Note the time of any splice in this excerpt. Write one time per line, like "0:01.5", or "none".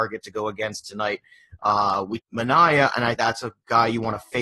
0:02.2
0:03.1